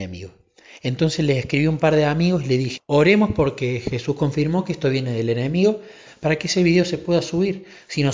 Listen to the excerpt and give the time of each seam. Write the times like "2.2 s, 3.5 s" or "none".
2.8 s